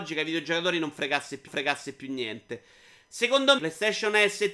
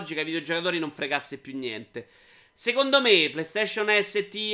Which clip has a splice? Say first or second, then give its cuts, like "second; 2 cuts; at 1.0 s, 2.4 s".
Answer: first; 2 cuts; at 1.5 s, 3.6 s